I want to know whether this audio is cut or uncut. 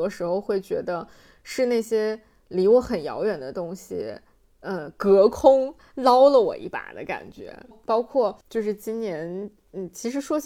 cut